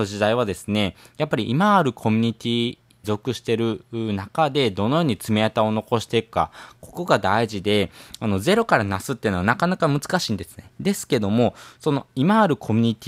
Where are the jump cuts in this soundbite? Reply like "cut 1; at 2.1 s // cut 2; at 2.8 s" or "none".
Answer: cut 1; at 3.0 s // cut 2; at 10.7 s